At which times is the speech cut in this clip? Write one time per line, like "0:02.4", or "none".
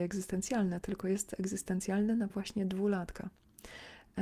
0:02.3

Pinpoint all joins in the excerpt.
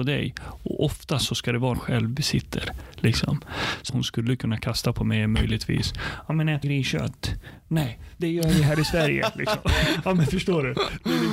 0:01.7
0:03.9
0:06.6

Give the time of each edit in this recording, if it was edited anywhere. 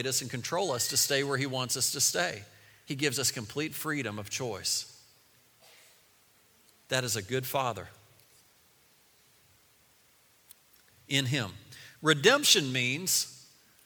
none

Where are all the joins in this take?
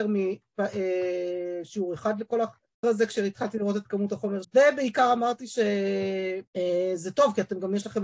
0:02.8
0:04.4
0:06.5

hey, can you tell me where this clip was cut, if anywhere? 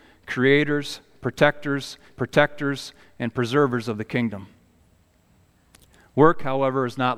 0:02.1

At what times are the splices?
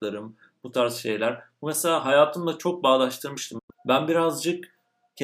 0:03.7

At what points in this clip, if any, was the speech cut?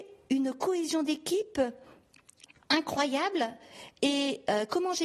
none

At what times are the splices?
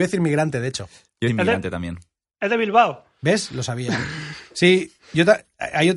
0:01.3

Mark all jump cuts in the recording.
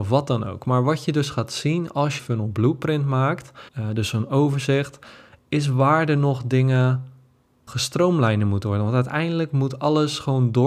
0:02.2
0:03.7
0:07.7

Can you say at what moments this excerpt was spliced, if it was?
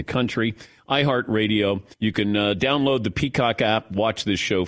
0:01.9

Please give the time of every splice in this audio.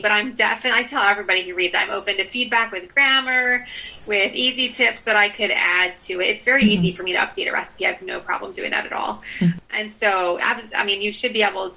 none

